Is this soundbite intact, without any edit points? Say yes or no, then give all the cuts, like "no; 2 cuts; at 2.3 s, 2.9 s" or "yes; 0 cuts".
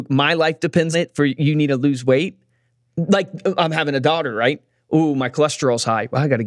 no; 1 cut; at 0.9 s